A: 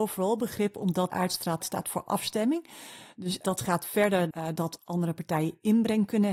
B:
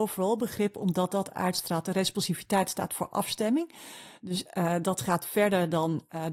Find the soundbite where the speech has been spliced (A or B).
A